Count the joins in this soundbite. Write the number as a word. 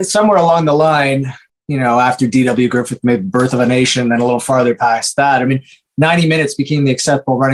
one